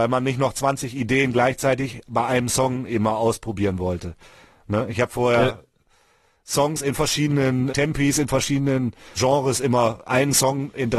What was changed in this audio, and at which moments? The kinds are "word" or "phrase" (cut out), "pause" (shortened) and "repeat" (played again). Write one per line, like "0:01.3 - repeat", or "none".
0:07.7 - word
0:09.2 - word